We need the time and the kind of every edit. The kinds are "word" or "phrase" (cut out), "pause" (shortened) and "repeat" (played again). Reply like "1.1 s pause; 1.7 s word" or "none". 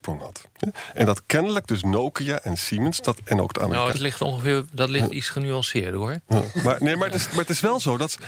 3.9 s word